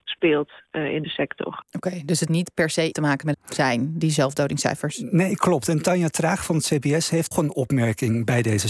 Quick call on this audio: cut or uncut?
cut